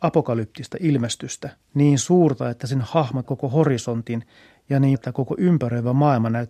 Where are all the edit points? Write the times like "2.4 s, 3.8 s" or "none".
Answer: 1.6 s, 3.2 s, 4.9 s